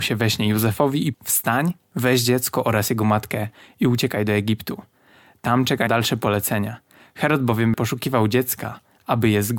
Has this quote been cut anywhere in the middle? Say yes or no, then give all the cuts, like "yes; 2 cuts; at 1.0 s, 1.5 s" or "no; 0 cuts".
yes; 3 cuts; at 1.1 s, 5.9 s, 7.7 s